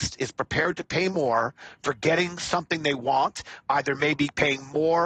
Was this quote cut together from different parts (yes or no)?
no